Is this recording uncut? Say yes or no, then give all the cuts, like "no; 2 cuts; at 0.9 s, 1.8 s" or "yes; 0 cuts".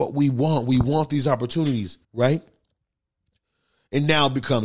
no; 1 cut; at 2.0 s